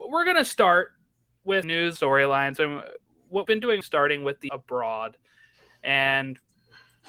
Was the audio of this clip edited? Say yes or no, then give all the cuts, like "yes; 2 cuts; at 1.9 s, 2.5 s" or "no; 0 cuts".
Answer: yes; 5 cuts; at 1.6 s, 1.9 s, 3.4 s, 3.8 s, 4.5 s